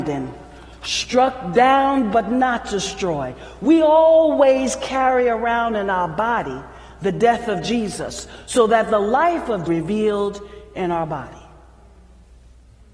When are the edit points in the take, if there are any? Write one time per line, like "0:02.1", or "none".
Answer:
0:09.7

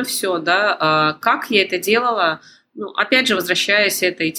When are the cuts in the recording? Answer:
none

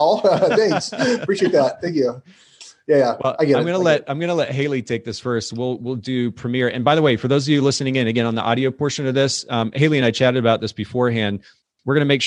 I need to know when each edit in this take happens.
none

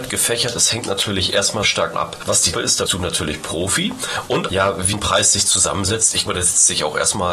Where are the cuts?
0:01.6
0:01.9
0:02.5
0:02.9
0:04.5
0:04.9
0:06.3

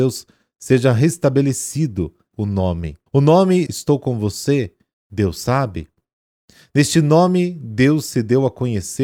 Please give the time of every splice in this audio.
0:02.3
0:03.1
0:03.7
0:04.9

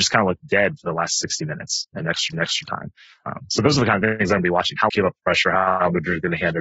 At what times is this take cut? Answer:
0:02.3
0:04.9

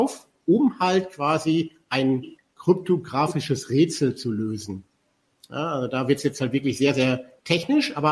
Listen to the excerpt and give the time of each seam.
none

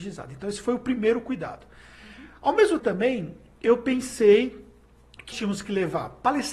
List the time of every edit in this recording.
0:02.8
0:05.3

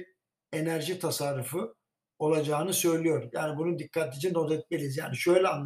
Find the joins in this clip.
none

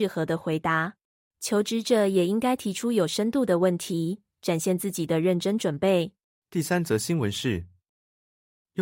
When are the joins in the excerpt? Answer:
0:01.2
0:06.3

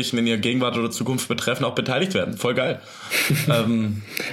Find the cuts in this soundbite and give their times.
none

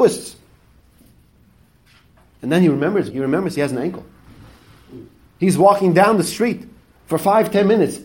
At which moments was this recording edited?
0:03.1

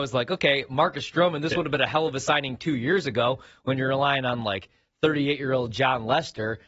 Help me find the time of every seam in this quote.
none

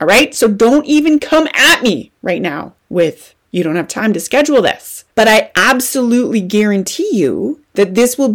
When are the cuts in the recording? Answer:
0:02.8
0:05.1

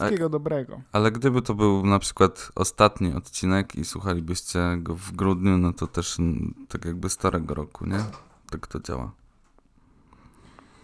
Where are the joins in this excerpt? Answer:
none

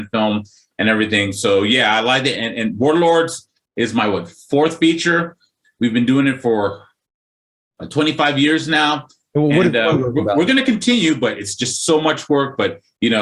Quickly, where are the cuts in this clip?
none

